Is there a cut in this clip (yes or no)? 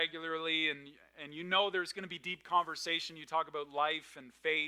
no